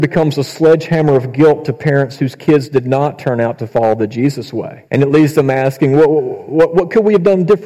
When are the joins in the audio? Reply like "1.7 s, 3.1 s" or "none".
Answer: 4.9 s